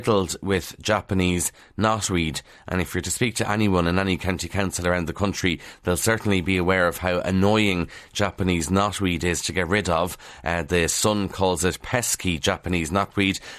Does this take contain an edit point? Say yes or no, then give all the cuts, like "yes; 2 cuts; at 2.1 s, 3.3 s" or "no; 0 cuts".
no; 0 cuts